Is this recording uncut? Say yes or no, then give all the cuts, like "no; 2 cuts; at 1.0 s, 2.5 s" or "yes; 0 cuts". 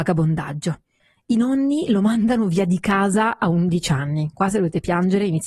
yes; 0 cuts